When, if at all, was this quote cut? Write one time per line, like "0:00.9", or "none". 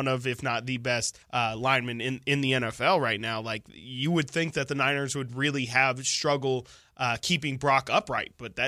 0:01.2